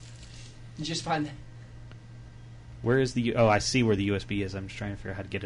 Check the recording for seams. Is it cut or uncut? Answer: uncut